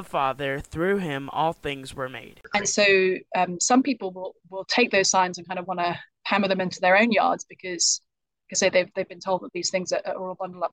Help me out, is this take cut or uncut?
cut